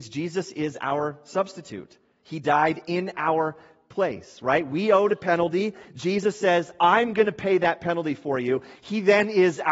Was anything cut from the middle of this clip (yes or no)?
no